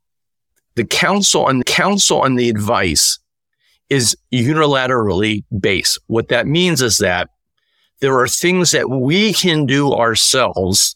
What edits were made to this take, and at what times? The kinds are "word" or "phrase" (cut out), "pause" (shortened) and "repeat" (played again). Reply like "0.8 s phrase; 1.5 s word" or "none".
1.6 s repeat